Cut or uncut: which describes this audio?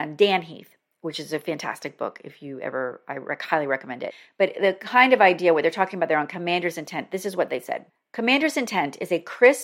uncut